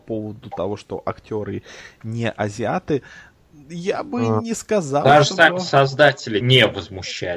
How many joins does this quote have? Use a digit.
1